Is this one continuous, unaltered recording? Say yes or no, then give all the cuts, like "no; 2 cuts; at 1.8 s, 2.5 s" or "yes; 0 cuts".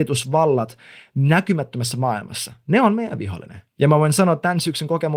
no; 1 cut; at 3.7 s